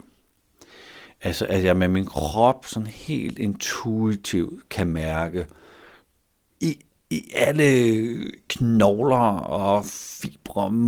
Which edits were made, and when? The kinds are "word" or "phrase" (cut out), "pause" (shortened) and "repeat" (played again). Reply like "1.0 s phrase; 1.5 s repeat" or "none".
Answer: none